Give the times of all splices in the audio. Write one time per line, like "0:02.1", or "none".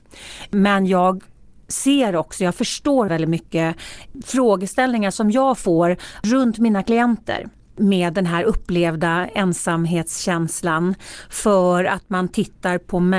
0:03.1

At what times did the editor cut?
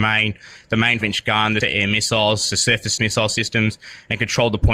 0:01.0
0:01.6
0:03.0

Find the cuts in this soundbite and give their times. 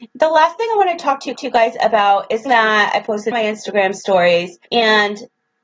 0:01.4
0:02.5
0:03.3
0:04.7

